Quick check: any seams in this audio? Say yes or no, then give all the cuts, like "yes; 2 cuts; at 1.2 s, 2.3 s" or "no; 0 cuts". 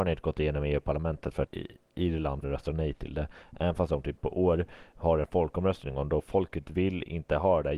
yes; 3 cuts; at 1.5 s, 2.4 s, 4.2 s